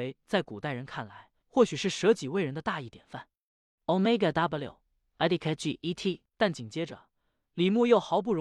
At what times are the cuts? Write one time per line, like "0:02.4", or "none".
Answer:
0:01.4
0:04.3
0:06.3